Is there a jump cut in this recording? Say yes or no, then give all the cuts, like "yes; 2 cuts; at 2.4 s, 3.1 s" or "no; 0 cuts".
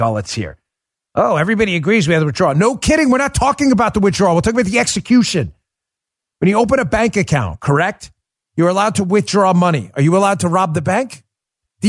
no; 0 cuts